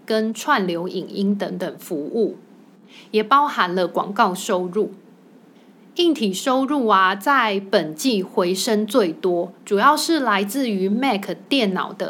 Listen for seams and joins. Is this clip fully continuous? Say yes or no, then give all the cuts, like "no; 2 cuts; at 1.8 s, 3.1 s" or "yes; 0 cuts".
yes; 0 cuts